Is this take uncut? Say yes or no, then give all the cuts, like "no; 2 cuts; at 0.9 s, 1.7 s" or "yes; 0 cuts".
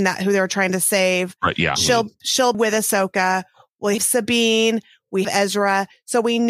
no; 3 cuts; at 2.5 s, 4.0 s, 5.2 s